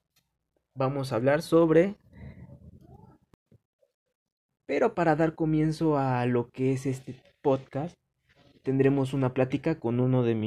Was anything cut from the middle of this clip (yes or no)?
no